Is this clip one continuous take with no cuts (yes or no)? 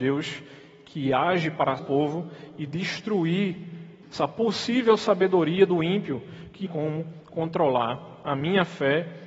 no